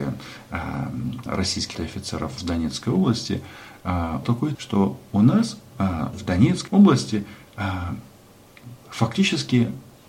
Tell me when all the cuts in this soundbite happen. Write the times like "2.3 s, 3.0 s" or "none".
1.3 s, 1.7 s, 4.2 s, 4.5 s, 6.1 s, 6.7 s